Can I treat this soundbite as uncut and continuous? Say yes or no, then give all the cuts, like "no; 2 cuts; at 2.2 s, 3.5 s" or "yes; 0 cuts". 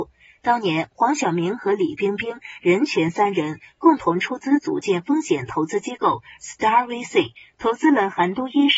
yes; 0 cuts